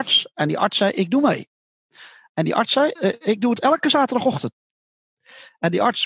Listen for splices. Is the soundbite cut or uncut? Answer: cut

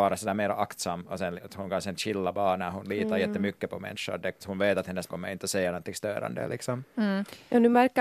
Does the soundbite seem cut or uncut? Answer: cut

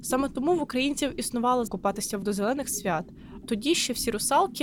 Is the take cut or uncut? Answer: cut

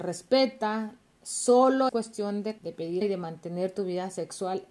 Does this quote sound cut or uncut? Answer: cut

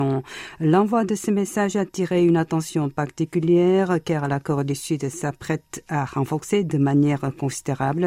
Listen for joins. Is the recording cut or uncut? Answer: uncut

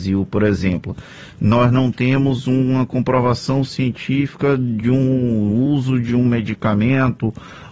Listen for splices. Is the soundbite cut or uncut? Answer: uncut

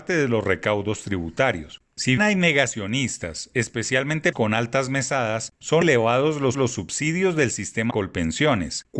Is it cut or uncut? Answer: cut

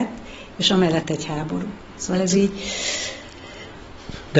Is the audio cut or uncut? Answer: cut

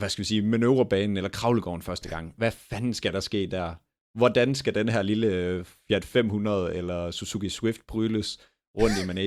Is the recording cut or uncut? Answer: uncut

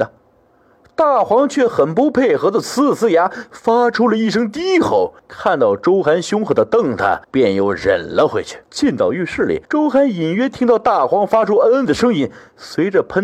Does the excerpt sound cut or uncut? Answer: cut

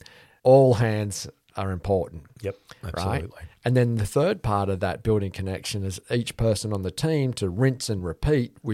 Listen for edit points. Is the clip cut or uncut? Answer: uncut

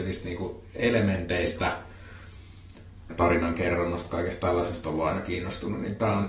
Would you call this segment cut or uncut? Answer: cut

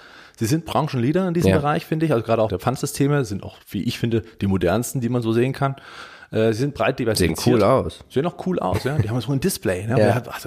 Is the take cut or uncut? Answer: cut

